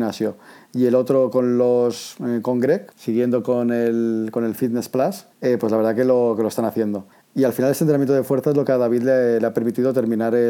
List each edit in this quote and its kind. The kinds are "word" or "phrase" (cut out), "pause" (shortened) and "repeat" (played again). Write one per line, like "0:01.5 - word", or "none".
0:02.9 - pause
0:05.3 - pause
0:07.1 - pause